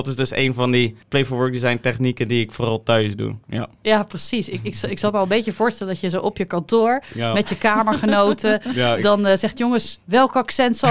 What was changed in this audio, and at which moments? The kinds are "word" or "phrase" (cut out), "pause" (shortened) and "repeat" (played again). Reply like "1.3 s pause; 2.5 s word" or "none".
1.0 s pause